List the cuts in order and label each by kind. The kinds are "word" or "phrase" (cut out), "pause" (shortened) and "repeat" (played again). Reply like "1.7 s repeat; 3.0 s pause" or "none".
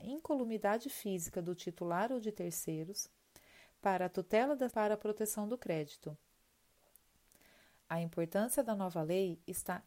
4.7 s phrase